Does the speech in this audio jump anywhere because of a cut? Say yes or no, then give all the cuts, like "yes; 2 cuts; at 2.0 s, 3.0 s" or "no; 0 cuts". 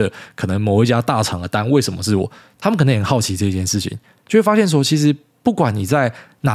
no; 0 cuts